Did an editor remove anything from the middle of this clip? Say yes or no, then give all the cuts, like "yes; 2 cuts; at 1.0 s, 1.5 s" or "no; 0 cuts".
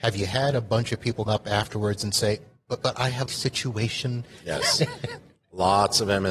yes; 3 cuts; at 1.3 s, 2.8 s, 3.3 s